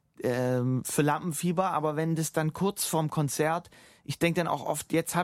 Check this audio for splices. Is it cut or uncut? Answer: uncut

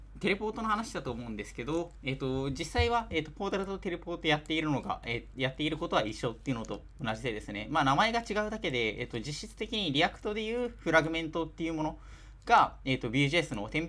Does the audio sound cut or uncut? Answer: uncut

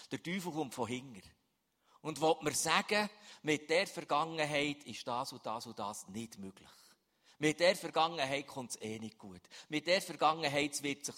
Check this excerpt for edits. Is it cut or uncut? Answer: uncut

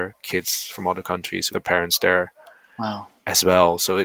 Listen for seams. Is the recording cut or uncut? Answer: cut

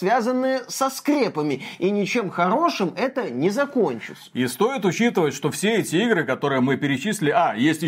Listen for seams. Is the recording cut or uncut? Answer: uncut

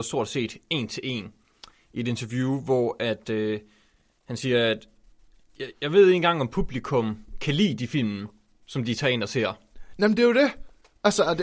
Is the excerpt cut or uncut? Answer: uncut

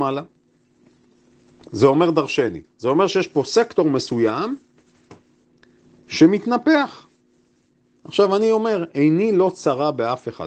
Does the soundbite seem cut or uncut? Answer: cut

